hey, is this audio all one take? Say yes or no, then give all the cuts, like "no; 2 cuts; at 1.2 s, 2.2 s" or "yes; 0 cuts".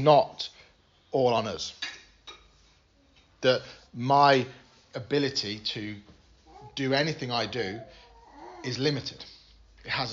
yes; 0 cuts